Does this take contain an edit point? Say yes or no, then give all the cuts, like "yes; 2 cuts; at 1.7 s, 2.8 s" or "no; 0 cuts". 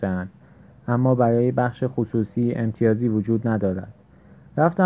no; 0 cuts